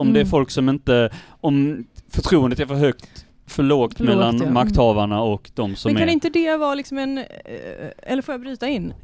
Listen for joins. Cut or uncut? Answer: uncut